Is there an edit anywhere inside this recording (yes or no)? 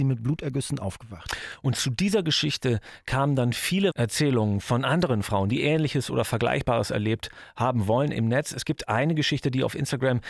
yes